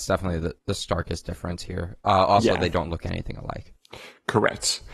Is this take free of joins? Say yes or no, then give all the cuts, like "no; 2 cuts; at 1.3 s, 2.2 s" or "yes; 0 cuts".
yes; 0 cuts